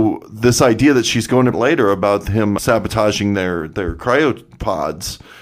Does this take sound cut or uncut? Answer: cut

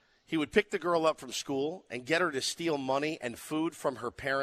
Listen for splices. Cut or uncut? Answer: uncut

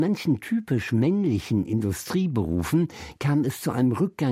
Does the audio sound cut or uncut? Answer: uncut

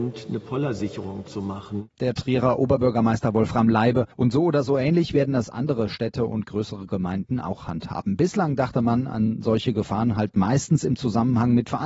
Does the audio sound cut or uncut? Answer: cut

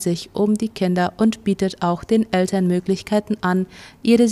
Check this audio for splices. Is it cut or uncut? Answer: uncut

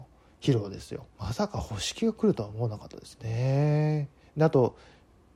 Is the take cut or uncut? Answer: cut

